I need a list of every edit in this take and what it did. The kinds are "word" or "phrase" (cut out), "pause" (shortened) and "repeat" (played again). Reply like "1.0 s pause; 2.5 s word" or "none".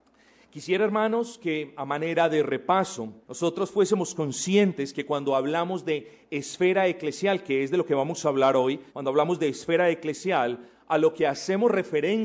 3.2 s pause; 8.9 s pause